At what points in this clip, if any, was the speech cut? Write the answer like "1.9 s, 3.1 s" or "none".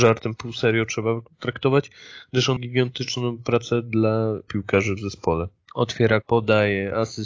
2.6 s, 4.5 s, 6.2 s

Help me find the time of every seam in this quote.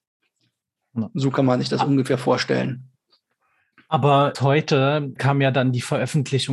4.3 s, 5.2 s

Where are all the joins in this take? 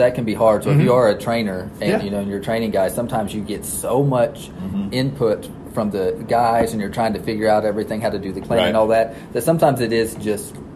8.4 s

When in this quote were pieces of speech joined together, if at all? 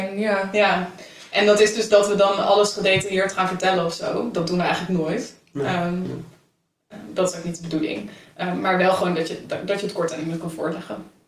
1.9 s

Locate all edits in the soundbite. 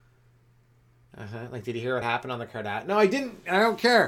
none

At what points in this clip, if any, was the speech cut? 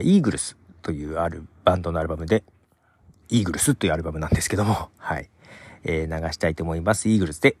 none

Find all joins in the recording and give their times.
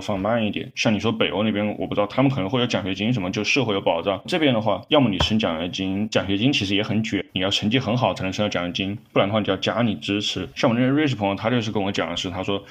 10.5 s

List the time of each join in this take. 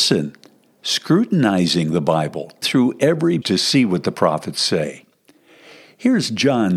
2.6 s, 3.4 s

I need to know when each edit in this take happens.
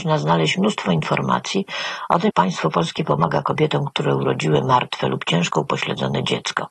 2.3 s

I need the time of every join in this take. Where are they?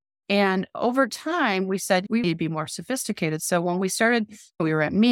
2.2 s

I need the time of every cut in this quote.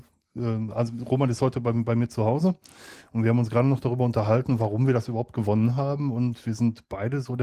none

